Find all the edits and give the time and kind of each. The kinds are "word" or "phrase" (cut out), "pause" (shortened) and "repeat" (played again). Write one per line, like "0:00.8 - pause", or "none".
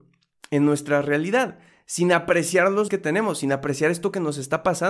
0:02.9 - word